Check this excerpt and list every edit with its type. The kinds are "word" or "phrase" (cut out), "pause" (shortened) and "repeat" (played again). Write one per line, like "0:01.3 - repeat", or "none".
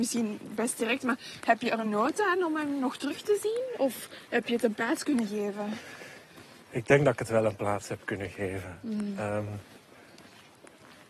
none